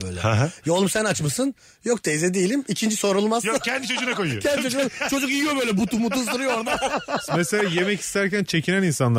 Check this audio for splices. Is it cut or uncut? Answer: uncut